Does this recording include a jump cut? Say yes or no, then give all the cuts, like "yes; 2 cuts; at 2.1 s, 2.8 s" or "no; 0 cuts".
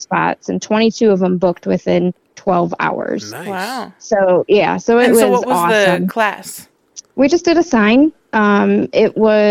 no; 0 cuts